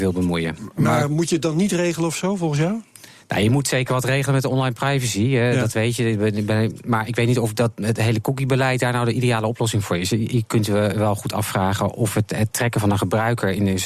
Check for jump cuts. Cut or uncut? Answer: uncut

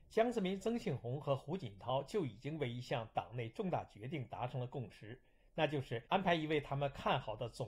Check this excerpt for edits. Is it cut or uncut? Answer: cut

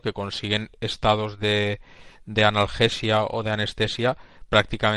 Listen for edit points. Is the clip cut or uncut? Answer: uncut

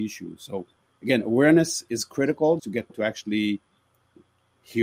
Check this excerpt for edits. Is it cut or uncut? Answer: cut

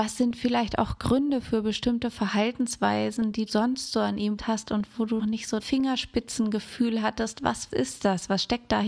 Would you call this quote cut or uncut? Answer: cut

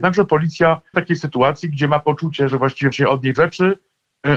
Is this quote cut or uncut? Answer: cut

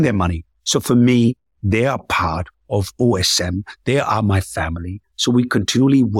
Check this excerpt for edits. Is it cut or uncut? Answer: uncut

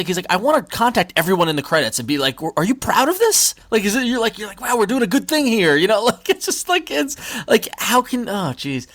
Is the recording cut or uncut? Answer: cut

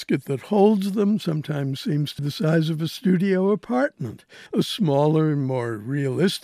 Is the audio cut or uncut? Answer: cut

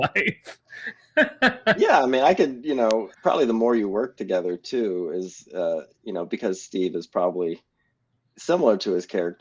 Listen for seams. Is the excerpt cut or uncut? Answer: cut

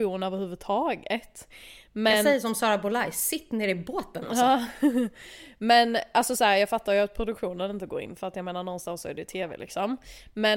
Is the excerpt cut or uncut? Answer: uncut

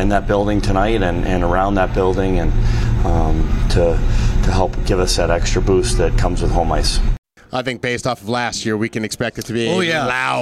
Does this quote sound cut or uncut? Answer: uncut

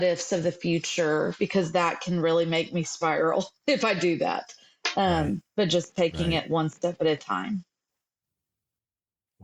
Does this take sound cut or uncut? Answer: uncut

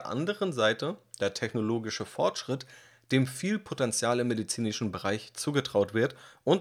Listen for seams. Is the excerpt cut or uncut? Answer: uncut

